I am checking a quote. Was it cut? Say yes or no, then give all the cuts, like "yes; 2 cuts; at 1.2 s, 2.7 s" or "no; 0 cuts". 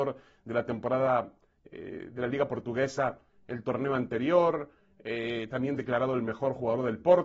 no; 0 cuts